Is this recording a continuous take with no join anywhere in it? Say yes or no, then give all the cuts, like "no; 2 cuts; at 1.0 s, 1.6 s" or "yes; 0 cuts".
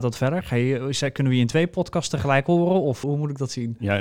no; 1 cut; at 3.0 s